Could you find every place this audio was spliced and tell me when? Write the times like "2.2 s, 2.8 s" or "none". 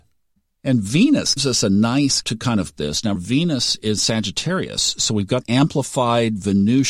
1.4 s, 2.2 s, 2.8 s, 3.1 s, 4.0 s, 5.4 s